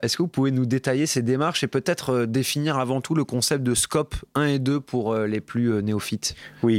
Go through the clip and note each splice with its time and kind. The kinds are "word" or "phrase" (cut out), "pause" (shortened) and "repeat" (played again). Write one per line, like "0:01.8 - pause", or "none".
none